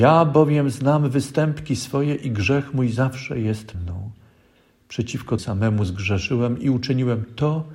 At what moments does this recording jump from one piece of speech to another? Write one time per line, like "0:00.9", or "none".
0:03.7
0:05.4